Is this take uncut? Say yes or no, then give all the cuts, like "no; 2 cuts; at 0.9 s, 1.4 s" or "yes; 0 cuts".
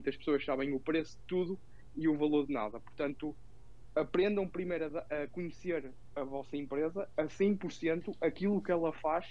yes; 0 cuts